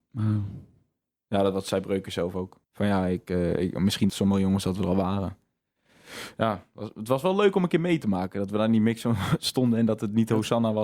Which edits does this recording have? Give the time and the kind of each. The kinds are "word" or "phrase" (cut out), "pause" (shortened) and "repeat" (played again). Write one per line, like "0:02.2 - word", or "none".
0:02.6 - pause
0:04.1 - word